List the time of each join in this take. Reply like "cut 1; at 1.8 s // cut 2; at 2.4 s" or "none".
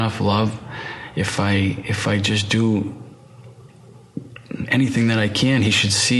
none